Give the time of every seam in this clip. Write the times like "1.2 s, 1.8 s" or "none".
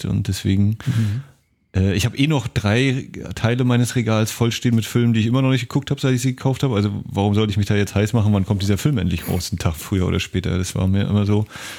none